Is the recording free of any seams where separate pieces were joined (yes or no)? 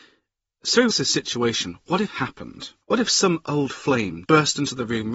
no